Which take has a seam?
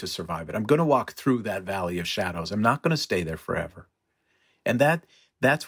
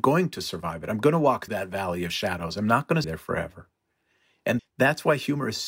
second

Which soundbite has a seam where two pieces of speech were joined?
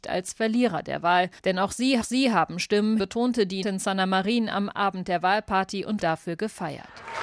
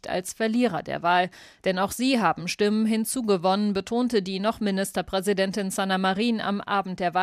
first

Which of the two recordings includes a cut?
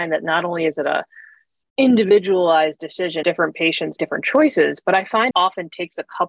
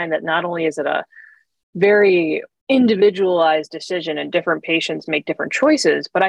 first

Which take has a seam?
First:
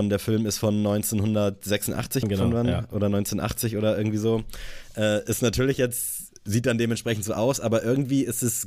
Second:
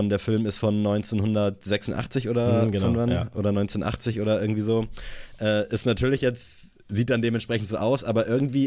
first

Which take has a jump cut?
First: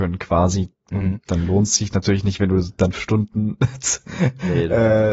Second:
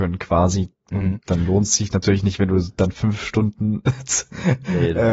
first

